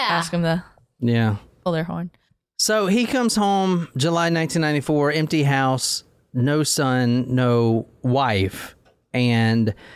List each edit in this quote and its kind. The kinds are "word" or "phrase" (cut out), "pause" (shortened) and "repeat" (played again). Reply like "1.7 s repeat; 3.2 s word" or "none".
none